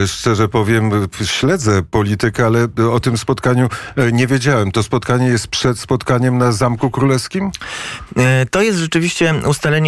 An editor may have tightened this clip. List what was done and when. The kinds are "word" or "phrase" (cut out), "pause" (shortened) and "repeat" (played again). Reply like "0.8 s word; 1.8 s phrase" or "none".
none